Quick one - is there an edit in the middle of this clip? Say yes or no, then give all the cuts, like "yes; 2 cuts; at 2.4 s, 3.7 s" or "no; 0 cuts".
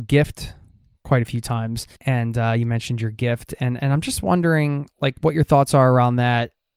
yes; 1 cut; at 1.9 s